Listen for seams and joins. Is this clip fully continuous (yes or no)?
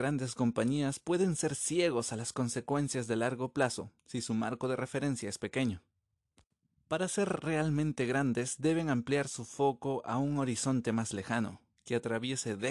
yes